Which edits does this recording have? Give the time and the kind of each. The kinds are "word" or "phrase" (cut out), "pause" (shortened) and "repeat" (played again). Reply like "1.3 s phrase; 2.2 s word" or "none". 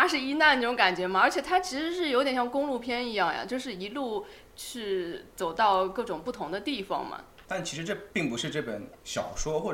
7.4 s pause